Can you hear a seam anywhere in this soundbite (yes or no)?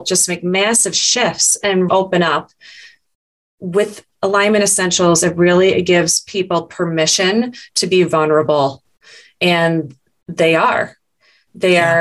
yes